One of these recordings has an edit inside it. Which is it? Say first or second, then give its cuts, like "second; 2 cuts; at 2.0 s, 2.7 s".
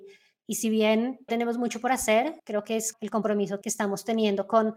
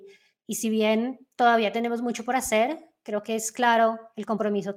first; 4 cuts; at 1.3 s, 2.4 s, 2.9 s, 3.6 s